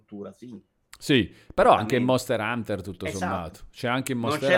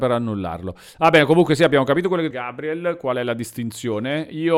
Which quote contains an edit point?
second; 1 cut; at 2.3 s

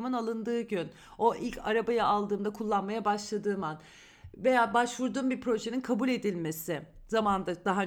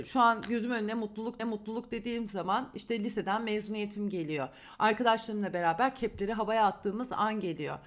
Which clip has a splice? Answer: second; 1 cut; at 1.4 s

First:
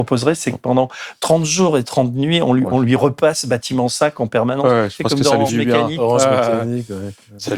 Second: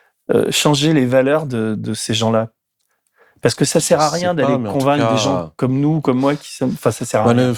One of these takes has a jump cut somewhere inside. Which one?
first; 1 cut; at 5.5 s

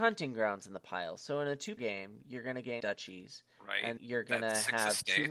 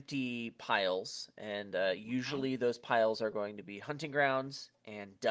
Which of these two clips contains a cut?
first; 3 cuts; at 1.8 s, 2.8 s, 4.0 s

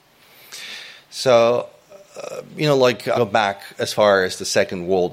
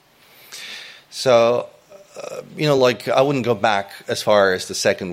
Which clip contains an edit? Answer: first; 1 cut; at 3.1 s

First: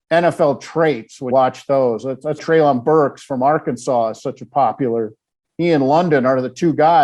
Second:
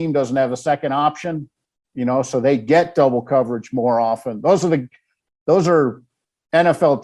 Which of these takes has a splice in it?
first; 2 cuts; at 1.3 s, 2.4 s

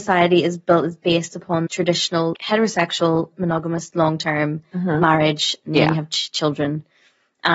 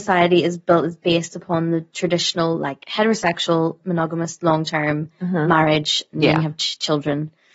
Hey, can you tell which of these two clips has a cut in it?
first; 2 cuts; at 1.7 s, 2.3 s

